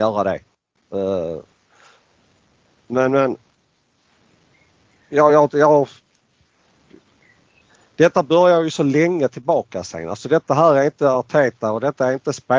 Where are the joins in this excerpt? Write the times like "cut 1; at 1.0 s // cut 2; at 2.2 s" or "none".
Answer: none

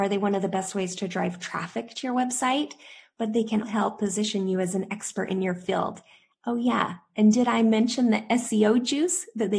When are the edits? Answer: cut 1; at 3.6 s

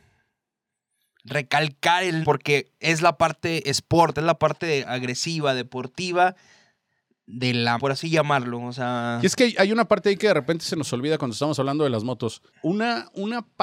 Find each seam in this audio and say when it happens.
cut 1; at 2.2 s // cut 2; at 7.8 s // cut 3; at 12.5 s

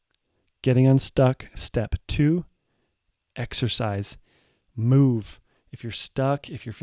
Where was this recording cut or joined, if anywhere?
none

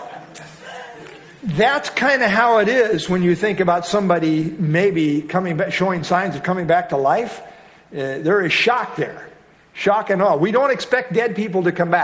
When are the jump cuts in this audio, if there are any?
none

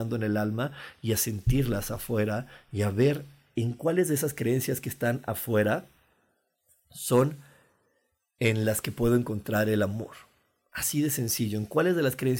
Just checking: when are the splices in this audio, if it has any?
none

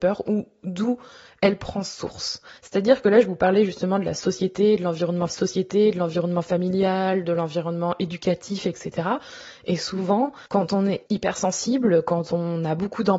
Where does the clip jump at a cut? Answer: cut 1; at 2.6 s // cut 2; at 5.3 s // cut 3; at 10.5 s // cut 4; at 11.1 s

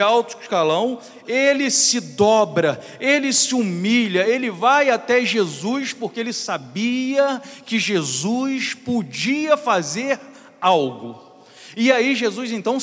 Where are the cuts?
none

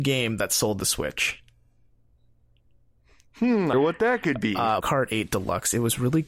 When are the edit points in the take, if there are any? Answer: cut 1; at 3.7 s // cut 2; at 4.8 s

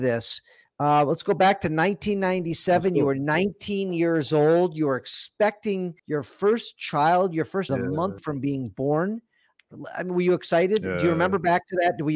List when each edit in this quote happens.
cut 1; at 6.0 s // cut 2; at 7.7 s // cut 3; at 8.2 s

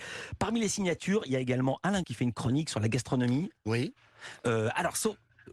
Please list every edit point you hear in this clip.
cut 1; at 2.0 s

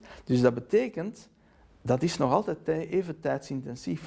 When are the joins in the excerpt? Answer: none

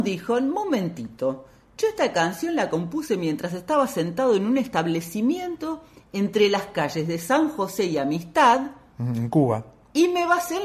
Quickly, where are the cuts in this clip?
none

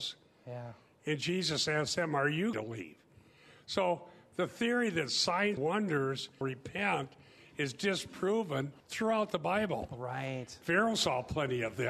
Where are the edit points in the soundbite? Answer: cut 1; at 2.5 s // cut 2; at 5.6 s // cut 3; at 6.4 s // cut 4; at 8.8 s

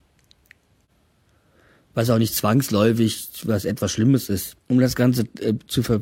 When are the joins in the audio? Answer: cut 1; at 4.6 s

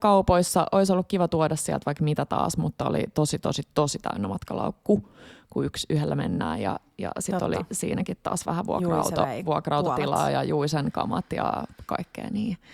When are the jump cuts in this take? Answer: none

